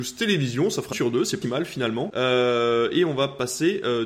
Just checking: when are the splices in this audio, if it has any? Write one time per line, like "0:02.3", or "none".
0:00.9
0:01.4